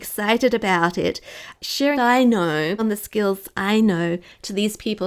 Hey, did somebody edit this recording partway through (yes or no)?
yes